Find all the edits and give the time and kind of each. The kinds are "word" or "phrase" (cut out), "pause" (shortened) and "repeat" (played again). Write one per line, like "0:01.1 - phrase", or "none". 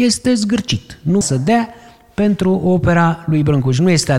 0:01.2 - word